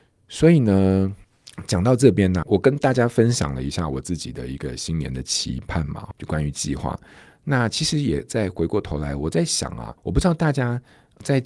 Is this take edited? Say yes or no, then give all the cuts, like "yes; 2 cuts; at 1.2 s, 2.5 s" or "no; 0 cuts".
yes; 3 cuts; at 2.4 s, 6.1 s, 10.0 s